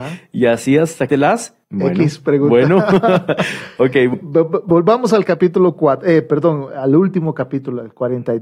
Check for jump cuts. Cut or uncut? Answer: cut